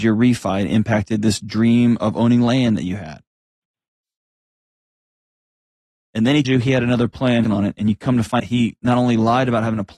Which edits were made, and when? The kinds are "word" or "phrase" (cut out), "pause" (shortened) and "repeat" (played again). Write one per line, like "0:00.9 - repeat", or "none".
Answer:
0:06.4 - word
0:07.4 - phrase
0:08.4 - word